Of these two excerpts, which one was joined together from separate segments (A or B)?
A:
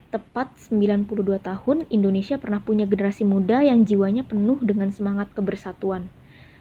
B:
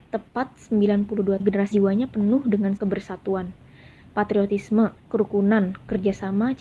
B